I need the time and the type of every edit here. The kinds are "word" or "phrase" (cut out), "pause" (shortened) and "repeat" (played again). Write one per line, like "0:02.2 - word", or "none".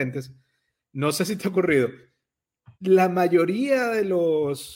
0:02.7 - pause